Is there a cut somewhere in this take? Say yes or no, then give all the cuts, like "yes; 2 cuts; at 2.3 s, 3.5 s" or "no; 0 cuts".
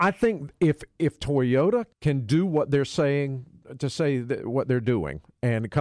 yes; 1 cut; at 1.9 s